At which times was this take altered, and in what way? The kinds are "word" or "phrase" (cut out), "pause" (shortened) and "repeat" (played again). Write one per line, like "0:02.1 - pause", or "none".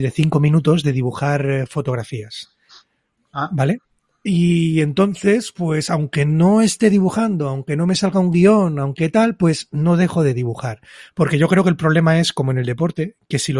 none